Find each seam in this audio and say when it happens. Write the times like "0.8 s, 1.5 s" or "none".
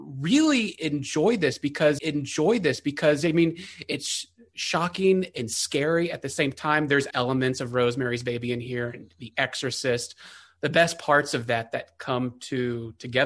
2.0 s, 7.1 s